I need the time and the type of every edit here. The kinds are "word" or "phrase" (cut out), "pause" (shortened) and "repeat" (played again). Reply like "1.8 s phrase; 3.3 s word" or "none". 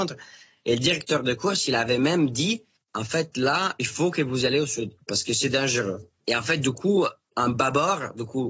2.8 s pause; 5.0 s pause; 6.2 s pause

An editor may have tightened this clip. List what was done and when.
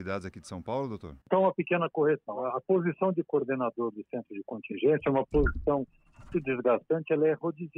1.2 s pause; 6.3 s word

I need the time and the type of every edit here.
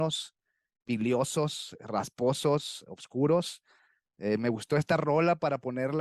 none

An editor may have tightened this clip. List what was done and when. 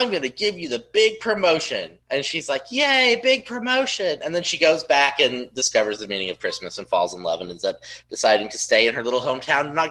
2.0 s pause

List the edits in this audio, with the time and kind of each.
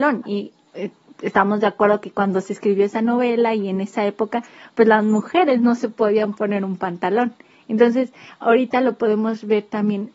none

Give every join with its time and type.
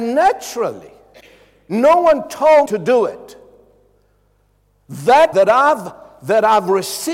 1.2 s pause; 2.7 s word; 5.3 s word

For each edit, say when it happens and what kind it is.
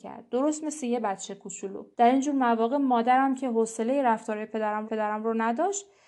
1.9 s pause; 4.8 s repeat

